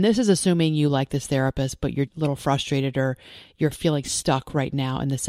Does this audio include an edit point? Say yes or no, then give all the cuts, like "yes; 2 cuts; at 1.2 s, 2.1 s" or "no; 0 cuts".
yes; 1 cut; at 2.1 s